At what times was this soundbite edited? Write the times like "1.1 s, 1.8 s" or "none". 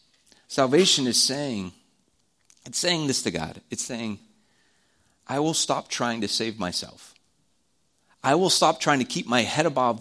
none